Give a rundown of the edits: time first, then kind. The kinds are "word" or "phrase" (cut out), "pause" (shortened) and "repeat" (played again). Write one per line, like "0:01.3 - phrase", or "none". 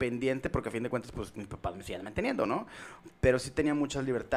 none